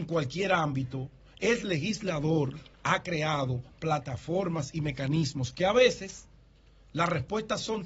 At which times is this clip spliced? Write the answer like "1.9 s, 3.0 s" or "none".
2.7 s